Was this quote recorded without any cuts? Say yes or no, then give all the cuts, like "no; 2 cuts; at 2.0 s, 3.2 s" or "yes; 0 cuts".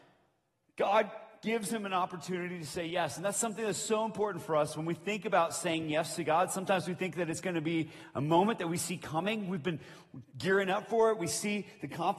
yes; 0 cuts